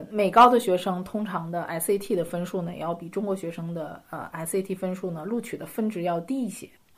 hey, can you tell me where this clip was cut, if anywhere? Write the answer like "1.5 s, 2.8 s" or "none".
none